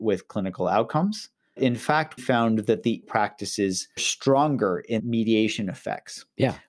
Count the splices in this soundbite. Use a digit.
5